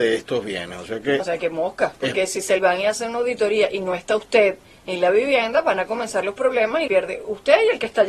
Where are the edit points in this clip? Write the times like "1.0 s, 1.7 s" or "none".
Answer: 1.2 s, 2.0 s, 2.6 s, 6.9 s

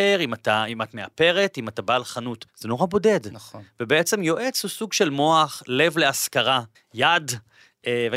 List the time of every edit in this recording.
2.5 s, 6.7 s

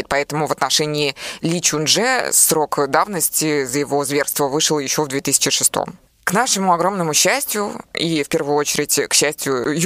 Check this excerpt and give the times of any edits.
none

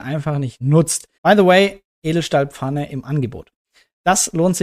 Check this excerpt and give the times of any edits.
1.1 s

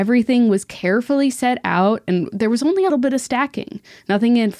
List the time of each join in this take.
2.9 s

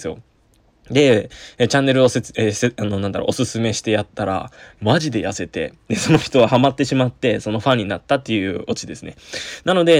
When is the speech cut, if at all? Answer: none

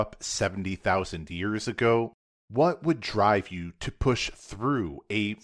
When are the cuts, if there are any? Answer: none

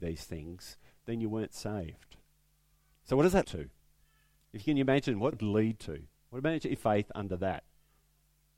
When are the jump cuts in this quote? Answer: 3.4 s, 5.3 s, 6.8 s

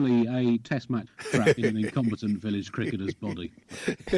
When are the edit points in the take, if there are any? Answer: 1.1 s, 1.6 s

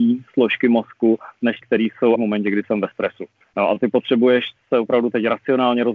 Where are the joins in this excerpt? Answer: 1.6 s, 2.2 s, 3.4 s

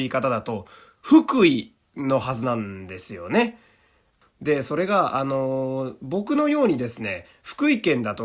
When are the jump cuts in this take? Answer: none

